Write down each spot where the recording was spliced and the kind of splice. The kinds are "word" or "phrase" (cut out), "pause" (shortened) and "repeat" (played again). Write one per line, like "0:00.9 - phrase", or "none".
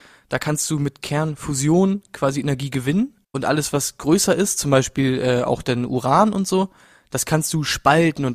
0:03.2 - pause